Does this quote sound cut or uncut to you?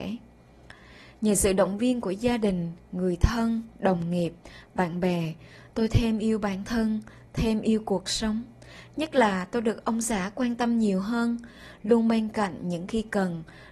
uncut